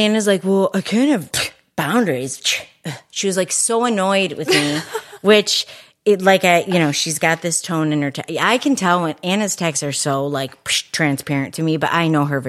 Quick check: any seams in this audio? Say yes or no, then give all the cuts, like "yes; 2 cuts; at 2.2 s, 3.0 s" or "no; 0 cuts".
yes; 1 cut; at 1.3 s